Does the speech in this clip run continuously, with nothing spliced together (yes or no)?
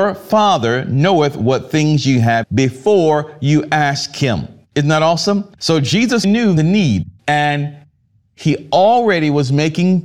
no